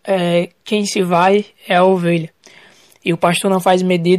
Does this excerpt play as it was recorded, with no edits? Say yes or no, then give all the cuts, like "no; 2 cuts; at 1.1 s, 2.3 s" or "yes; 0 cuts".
yes; 0 cuts